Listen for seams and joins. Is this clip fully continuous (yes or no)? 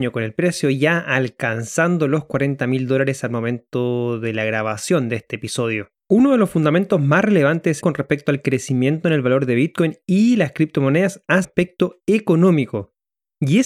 no